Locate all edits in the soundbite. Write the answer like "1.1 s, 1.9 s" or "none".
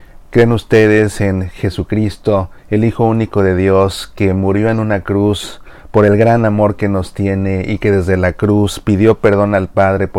2.6 s